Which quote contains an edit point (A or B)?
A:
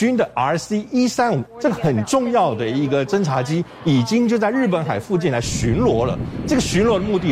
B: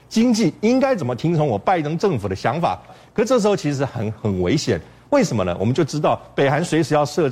A